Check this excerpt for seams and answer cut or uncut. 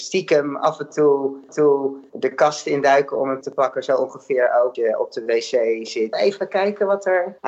cut